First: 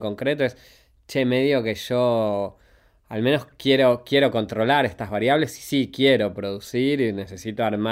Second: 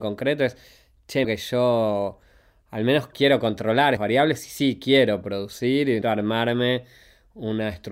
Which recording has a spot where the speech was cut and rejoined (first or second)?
second